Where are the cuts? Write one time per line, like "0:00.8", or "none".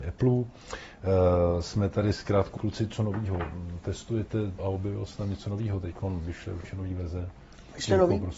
0:02.6
0:04.6